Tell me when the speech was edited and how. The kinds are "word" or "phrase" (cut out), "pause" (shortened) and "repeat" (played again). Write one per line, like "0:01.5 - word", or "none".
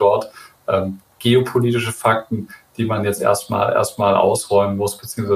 none